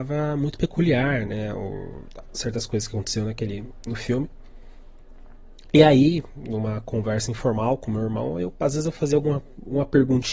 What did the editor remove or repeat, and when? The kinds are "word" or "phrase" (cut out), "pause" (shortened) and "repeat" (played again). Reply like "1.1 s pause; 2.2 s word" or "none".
none